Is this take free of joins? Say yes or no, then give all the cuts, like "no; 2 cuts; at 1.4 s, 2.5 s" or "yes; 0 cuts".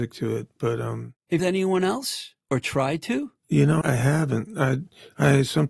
no; 3 cuts; at 1.4 s, 2.4 s, 3.8 s